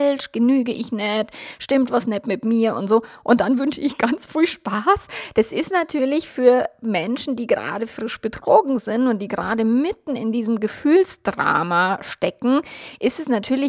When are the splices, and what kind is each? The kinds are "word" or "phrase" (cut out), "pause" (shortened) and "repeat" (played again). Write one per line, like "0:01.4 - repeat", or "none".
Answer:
none